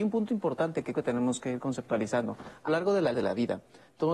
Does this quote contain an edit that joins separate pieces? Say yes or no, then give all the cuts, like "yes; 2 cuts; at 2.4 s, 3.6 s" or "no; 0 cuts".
yes; 3 cuts; at 0.9 s, 2.7 s, 3.1 s